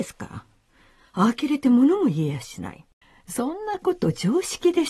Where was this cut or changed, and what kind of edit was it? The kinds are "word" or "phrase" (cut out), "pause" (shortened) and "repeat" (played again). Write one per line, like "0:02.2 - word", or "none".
0:03.0 - pause